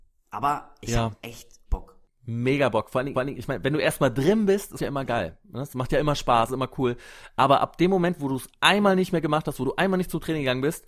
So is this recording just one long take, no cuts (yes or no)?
no